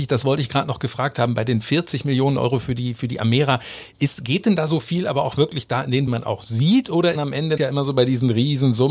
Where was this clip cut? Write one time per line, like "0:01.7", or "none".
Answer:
0:06.1
0:07.1
0:07.6